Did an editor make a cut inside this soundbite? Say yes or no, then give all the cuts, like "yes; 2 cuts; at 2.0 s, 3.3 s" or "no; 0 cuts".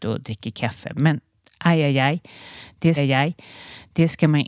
yes; 1 cut; at 3.0 s